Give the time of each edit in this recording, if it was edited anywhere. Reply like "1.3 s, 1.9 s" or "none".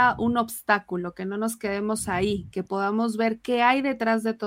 none